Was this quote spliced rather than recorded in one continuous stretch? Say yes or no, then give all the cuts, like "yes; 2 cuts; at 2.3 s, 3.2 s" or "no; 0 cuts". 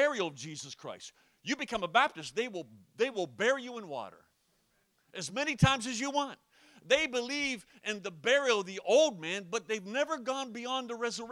no; 0 cuts